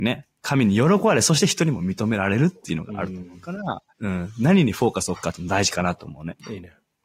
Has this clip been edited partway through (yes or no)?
yes